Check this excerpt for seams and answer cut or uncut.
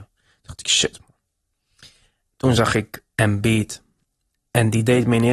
uncut